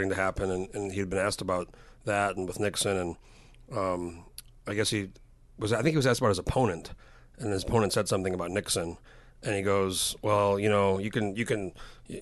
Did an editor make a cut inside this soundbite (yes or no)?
no